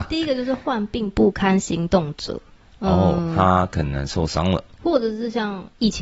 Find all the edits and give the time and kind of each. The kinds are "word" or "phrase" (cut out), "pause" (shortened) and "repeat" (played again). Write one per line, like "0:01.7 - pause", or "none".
0:02.6 - pause
0:04.7 - pause